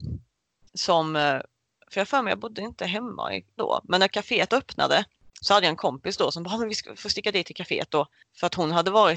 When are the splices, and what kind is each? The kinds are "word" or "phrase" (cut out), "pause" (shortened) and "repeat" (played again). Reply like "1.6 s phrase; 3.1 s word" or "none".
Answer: 3.6 s word